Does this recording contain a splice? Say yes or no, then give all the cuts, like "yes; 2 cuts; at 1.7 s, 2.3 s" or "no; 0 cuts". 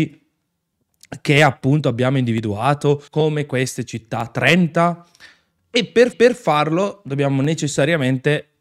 yes; 2 cuts; at 3.1 s, 6.1 s